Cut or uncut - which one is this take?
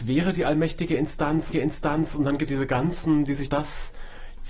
cut